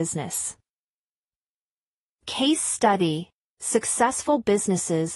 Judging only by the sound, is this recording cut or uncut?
uncut